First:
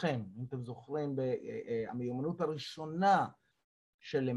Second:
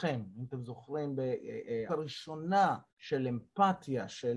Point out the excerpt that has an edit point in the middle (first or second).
second